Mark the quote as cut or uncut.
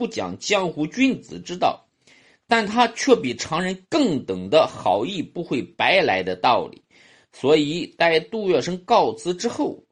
uncut